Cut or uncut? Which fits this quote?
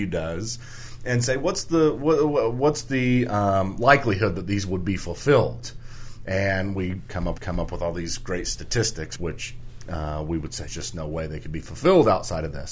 cut